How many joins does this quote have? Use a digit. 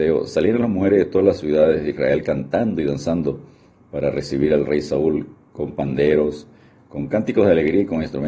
0